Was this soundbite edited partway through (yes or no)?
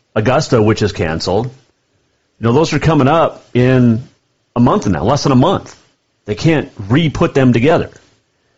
no